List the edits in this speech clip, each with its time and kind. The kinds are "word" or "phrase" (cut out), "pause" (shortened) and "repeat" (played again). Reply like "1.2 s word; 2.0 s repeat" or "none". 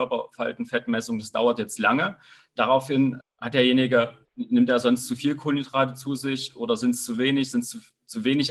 1.8 s word; 3.2 s word; 4.2 s word